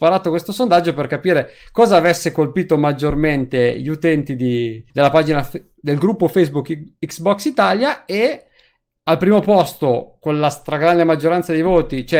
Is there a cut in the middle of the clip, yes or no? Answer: yes